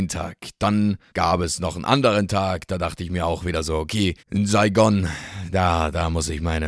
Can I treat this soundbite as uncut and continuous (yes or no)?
no